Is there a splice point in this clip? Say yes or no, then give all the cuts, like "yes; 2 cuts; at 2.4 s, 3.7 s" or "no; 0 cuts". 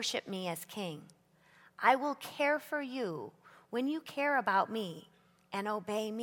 no; 0 cuts